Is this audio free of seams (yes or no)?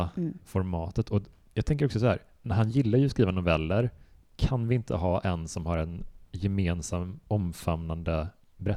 yes